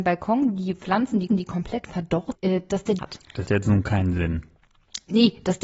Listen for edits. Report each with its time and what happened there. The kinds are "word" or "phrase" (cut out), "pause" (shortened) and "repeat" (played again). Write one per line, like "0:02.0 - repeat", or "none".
0:01.3 - repeat
0:02.3 - word
0:03.0 - word
0:03.5 - word